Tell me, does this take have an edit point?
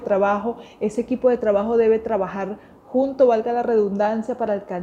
no; 0 cuts

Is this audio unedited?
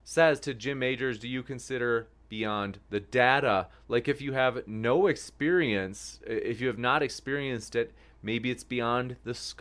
yes; 0 cuts

